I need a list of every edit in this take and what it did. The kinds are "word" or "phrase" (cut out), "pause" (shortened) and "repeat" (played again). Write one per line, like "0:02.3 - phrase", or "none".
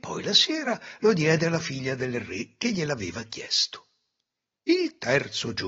none